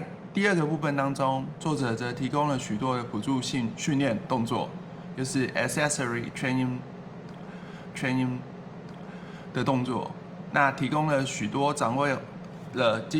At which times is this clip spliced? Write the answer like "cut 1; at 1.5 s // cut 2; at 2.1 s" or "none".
cut 1; at 7.9 s